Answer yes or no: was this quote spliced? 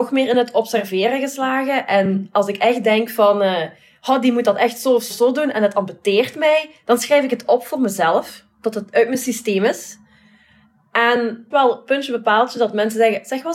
yes